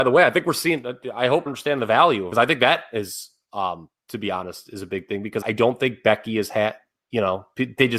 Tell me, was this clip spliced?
yes; 4 cuts; at 1.5 s, 2.3 s, 4.0 s, 5.4 s

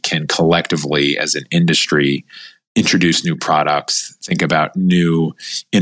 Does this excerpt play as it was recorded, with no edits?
yes; 0 cuts

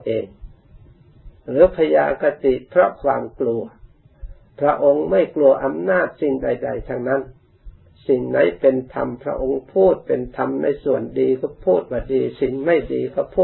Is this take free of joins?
yes; 0 cuts

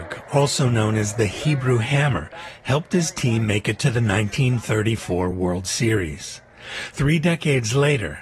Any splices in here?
no; 0 cuts

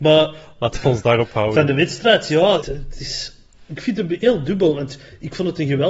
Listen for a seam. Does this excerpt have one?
yes; 1 cut; at 2.6 s

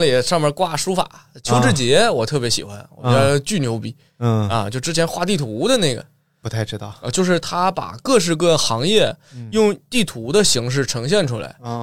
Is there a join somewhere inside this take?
yes; 1 cut; at 6.4 s

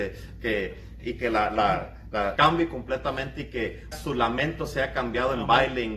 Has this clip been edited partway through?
yes; 3 cuts; at 1.0 s, 2.4 s, 3.9 s

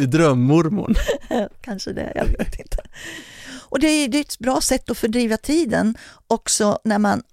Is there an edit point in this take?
no; 0 cuts

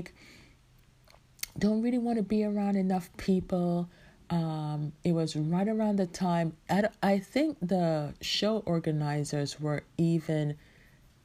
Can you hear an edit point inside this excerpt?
no; 0 cuts

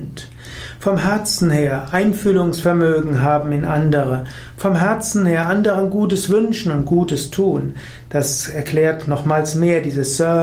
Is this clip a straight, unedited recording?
yes; 0 cuts

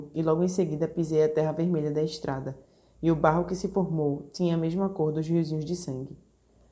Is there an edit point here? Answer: no; 0 cuts

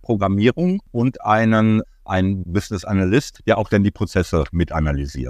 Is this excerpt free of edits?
no; 1 cut; at 2.4 s

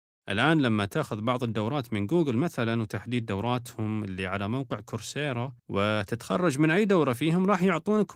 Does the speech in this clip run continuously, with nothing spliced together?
no; 1 cut; at 5.6 s

